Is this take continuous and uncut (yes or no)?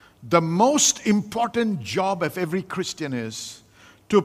yes